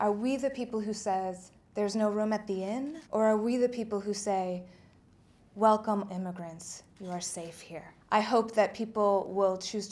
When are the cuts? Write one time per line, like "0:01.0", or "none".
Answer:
0:01.6
0:03.1
0:06.1
0:08.0